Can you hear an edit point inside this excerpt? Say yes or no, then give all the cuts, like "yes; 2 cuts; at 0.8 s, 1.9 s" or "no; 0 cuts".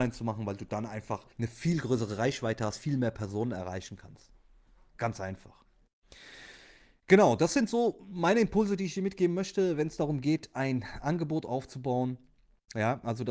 yes; 1 cut; at 1.3 s